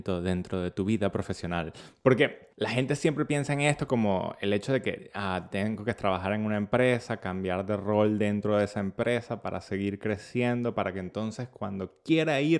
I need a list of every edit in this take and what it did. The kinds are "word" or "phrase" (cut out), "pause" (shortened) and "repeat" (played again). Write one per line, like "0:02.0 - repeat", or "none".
0:02.5 - pause